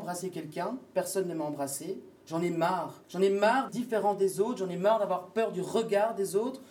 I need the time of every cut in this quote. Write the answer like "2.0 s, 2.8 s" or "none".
2.2 s, 3.0 s, 3.7 s